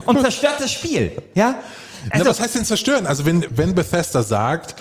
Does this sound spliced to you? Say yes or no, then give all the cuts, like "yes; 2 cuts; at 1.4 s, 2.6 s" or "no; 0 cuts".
yes; 1 cut; at 3.5 s